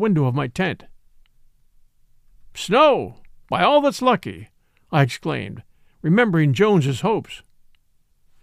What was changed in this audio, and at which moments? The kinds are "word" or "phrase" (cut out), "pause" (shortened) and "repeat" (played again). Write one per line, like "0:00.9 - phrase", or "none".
none